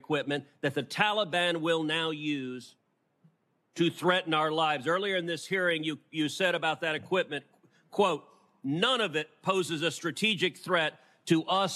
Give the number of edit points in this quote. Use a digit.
0